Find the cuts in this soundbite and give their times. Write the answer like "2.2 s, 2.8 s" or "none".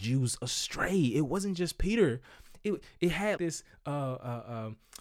3.4 s